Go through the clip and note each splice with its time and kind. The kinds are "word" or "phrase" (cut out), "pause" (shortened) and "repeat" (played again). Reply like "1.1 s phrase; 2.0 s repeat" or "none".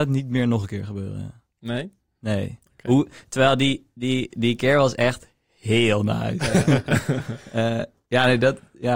none